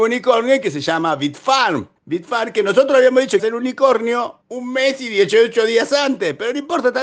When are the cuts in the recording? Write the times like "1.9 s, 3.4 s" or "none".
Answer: 2.0 s, 3.4 s, 4.4 s